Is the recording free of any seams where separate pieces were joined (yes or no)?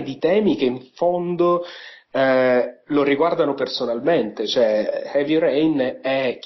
yes